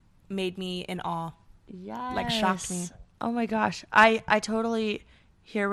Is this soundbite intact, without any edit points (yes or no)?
yes